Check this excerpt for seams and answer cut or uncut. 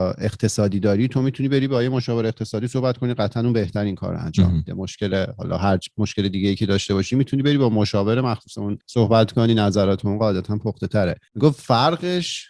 cut